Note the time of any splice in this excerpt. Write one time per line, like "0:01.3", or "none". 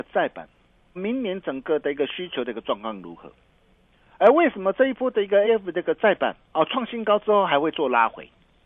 0:01.0
0:05.4
0:06.4